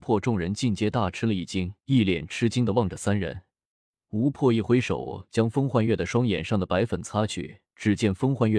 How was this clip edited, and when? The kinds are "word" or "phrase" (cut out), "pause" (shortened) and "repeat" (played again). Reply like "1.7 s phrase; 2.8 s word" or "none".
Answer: 1.8 s pause; 3.7 s pause; 7.7 s pause